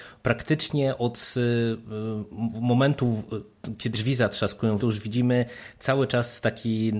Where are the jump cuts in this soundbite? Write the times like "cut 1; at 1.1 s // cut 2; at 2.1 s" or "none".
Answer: cut 1; at 3.9 s // cut 2; at 4.8 s